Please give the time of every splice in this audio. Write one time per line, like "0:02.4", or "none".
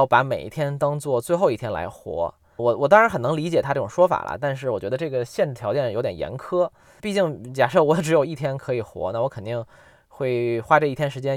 0:02.6
0:07.0